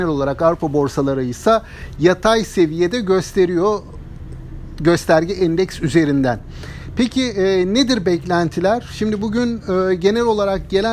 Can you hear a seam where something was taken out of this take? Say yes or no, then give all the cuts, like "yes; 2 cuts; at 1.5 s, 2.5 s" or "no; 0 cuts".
no; 0 cuts